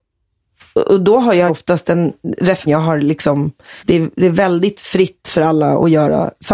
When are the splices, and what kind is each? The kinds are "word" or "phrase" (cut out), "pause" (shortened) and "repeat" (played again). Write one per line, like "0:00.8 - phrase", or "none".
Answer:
0:01.5 - word
0:02.7 - phrase
0:03.8 - pause